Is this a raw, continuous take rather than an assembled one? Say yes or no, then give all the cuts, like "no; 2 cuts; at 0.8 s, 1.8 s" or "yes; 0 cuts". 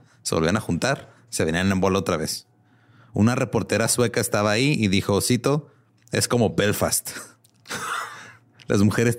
yes; 0 cuts